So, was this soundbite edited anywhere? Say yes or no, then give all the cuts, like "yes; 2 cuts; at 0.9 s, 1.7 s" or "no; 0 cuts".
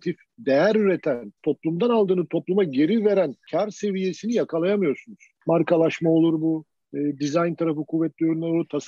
yes; 1 cut; at 1.4 s